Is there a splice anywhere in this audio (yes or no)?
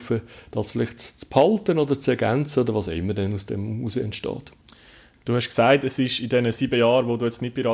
no